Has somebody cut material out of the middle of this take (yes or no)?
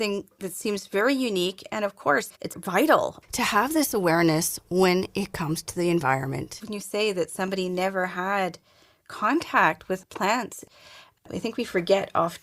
yes